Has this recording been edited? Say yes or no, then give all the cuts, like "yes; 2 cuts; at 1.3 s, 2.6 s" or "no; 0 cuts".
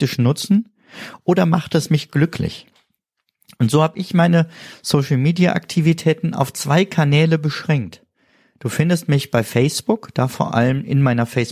no; 0 cuts